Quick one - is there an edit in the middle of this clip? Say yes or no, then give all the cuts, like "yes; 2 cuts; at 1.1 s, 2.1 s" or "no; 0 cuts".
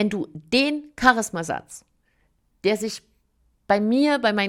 no; 0 cuts